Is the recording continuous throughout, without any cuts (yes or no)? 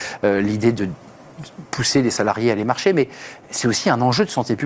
yes